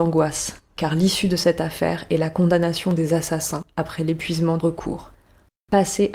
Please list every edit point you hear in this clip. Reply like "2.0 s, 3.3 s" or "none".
4.6 s